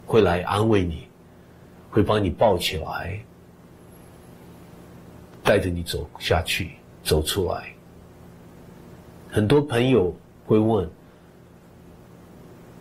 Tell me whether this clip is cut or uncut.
uncut